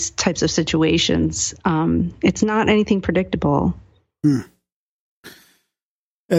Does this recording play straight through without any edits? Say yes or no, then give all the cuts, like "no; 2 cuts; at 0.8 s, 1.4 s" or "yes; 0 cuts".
yes; 0 cuts